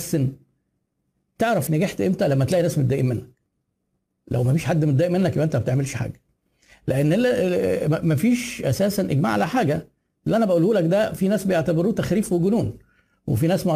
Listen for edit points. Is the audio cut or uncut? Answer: cut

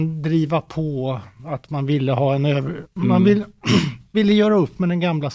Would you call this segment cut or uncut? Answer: cut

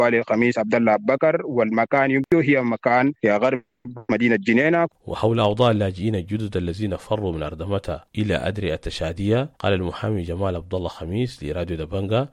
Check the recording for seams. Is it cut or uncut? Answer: cut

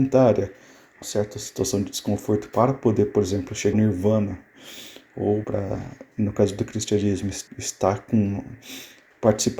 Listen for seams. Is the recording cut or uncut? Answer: cut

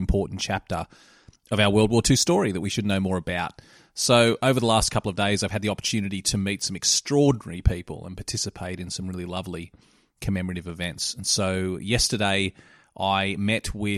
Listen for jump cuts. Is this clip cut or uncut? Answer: uncut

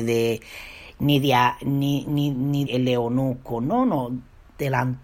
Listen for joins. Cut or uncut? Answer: cut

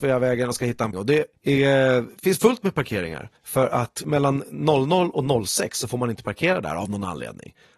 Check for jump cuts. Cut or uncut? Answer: cut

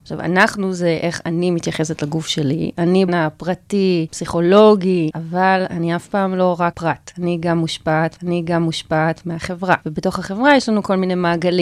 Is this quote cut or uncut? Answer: cut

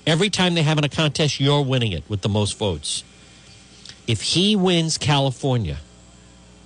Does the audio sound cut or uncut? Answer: cut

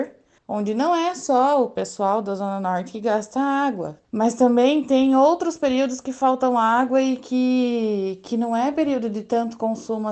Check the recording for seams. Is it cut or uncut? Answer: cut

